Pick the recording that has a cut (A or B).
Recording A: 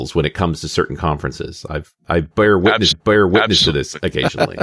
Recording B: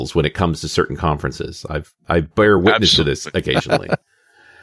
A